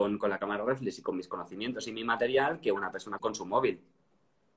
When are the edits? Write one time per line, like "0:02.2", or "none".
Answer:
0:03.2